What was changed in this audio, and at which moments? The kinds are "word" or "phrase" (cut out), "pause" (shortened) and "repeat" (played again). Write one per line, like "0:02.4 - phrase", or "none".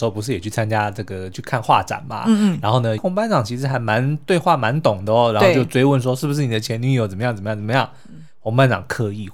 0:03.0 - phrase